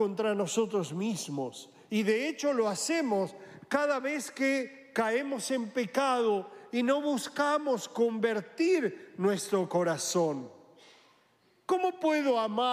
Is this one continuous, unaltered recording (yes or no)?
yes